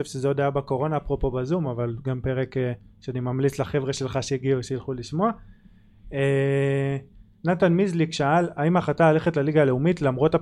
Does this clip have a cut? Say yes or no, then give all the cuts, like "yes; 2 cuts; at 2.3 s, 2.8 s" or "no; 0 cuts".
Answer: no; 0 cuts